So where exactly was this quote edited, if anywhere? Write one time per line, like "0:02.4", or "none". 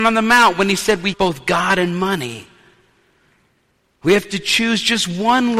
0:01.1